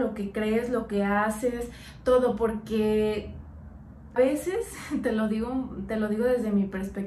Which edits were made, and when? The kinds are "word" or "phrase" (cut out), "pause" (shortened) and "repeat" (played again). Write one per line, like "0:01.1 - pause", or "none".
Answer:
0:04.2 - word